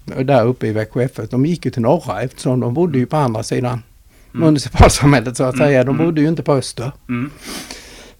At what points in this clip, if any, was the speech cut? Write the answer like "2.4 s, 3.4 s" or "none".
none